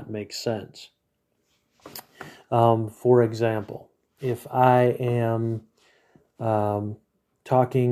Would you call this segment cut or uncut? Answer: uncut